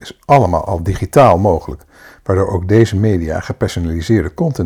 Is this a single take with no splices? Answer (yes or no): yes